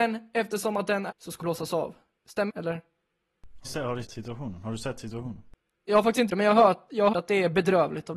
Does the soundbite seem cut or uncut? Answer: cut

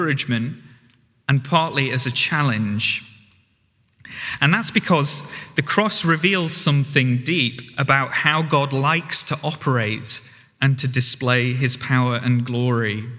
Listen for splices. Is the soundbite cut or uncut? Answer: uncut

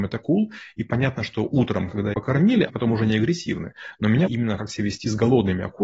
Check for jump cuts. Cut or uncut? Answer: cut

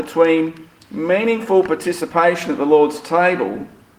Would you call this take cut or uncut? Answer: uncut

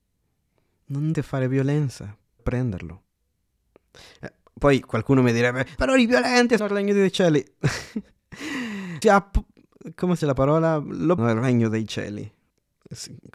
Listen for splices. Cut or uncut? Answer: cut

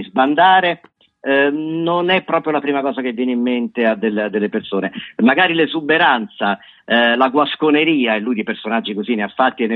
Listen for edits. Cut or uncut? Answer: uncut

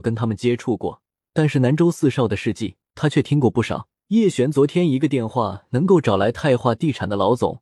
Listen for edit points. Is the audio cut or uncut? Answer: cut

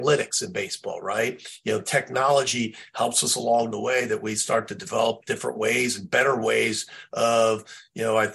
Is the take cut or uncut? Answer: uncut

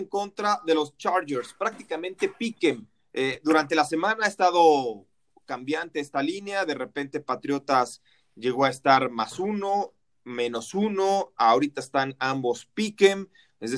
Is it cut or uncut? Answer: uncut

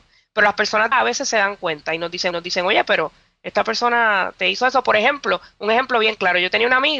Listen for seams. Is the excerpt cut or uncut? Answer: cut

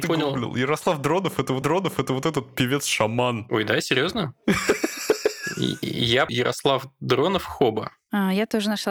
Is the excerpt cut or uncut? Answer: cut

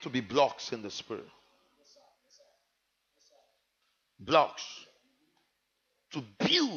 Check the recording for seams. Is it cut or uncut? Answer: uncut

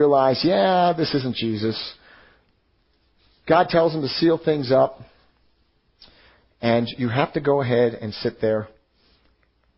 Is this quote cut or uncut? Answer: uncut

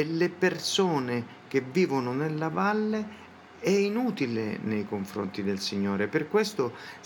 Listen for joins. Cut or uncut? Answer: uncut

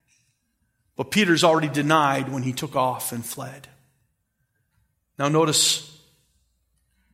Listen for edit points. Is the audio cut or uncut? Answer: uncut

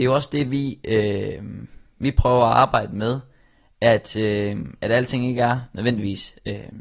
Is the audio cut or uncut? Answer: uncut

